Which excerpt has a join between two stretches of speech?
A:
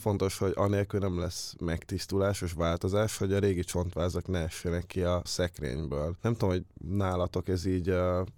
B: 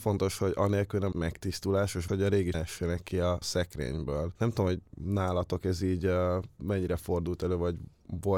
B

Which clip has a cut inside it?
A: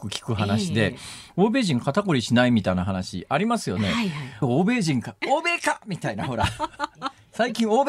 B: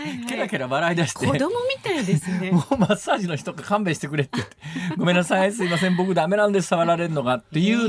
A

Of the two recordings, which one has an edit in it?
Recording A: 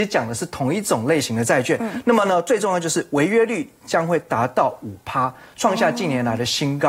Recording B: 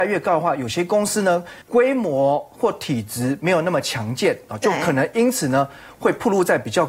B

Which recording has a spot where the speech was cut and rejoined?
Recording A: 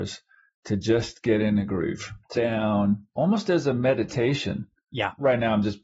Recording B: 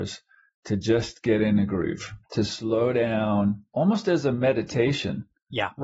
A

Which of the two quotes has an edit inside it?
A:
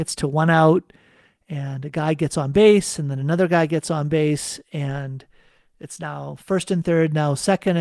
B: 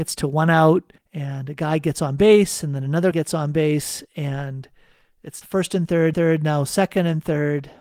B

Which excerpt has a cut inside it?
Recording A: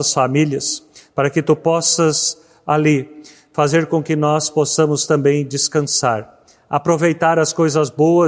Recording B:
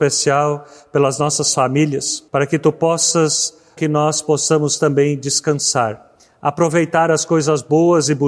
B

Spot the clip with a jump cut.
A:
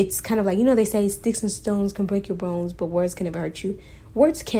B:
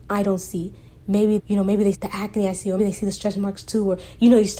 B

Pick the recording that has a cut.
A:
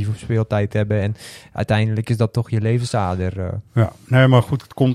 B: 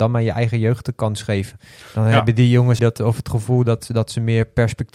B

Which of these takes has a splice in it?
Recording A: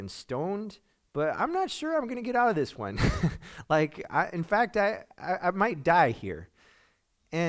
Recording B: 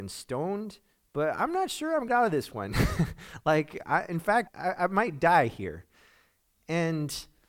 B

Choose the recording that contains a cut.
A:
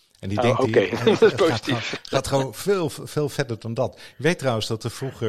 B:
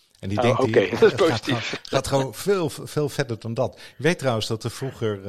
B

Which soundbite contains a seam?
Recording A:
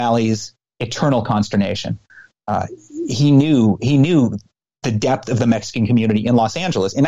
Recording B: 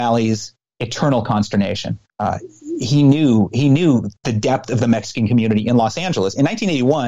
B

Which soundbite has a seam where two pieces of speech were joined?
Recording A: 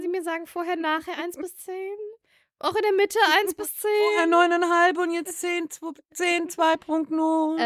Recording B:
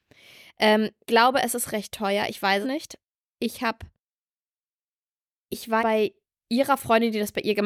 B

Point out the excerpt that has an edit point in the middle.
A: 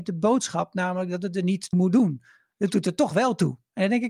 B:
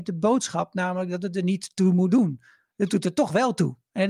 A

